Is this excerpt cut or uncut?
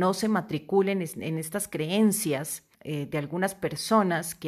cut